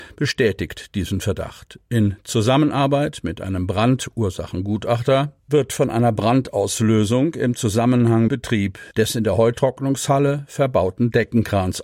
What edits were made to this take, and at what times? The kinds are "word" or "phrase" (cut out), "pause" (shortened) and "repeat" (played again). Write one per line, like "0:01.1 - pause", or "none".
0:05.4 - pause
0:08.3 - phrase
0:08.9 - pause